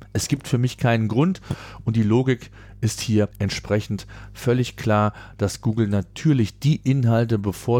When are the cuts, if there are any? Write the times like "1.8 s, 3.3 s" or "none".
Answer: 3.3 s